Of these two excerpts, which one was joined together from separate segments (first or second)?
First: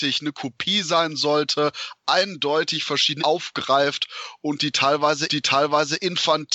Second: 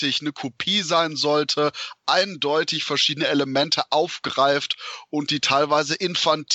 first